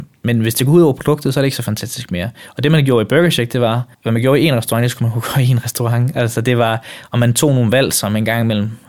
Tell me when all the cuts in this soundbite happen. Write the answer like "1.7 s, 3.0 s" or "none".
3.9 s